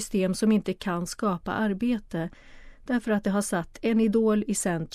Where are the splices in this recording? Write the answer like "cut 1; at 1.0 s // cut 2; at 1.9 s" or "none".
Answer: none